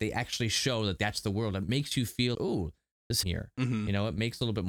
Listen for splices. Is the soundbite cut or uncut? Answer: cut